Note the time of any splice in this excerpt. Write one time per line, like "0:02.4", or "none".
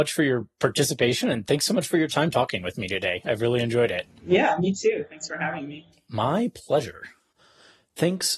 none